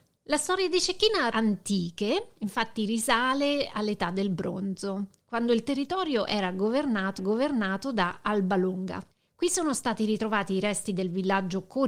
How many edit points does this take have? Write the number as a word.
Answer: four